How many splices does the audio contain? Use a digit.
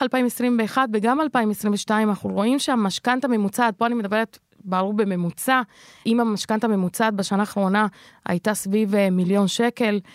0